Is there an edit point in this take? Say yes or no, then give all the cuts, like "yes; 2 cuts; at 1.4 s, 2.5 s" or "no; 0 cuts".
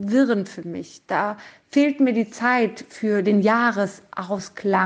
no; 0 cuts